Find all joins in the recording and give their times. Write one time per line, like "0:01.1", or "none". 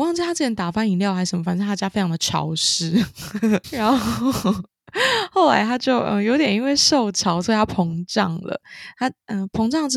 0:03.6

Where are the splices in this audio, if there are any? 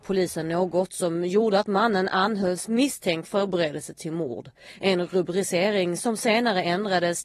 0:03.2

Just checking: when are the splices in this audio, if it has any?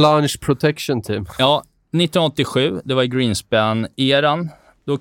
none

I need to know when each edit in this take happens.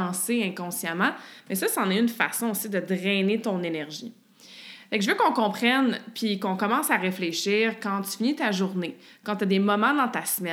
none

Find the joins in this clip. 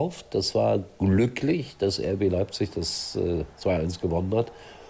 none

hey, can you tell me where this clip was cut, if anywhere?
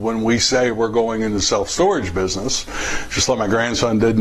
none

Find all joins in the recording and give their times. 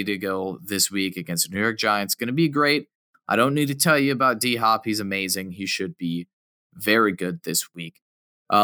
none

